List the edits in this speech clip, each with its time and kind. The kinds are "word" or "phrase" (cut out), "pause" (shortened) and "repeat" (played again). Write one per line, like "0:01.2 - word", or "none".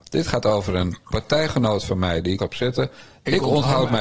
0:02.4 - word